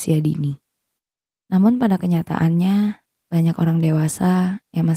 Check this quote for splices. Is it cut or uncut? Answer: uncut